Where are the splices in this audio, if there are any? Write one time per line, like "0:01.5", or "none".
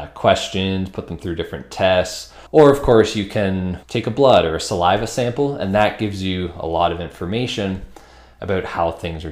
0:02.5
0:03.8